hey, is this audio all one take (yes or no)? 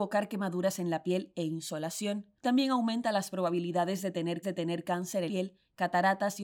no